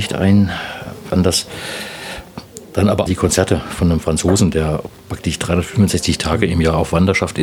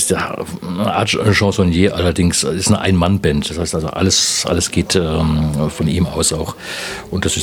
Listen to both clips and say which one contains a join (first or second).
first